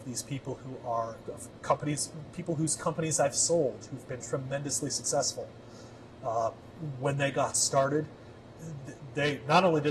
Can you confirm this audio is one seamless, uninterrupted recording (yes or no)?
yes